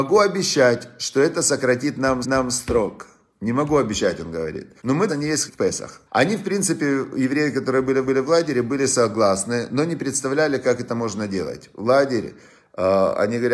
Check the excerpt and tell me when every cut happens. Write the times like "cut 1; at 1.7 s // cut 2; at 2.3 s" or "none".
cut 1; at 2.2 s // cut 2; at 4.8 s // cut 3; at 5.1 s // cut 4; at 5.5 s // cut 5; at 6.1 s // cut 6; at 8.0 s